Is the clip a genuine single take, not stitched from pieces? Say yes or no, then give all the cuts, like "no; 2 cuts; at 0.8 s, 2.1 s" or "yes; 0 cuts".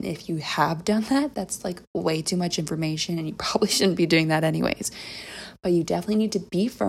yes; 0 cuts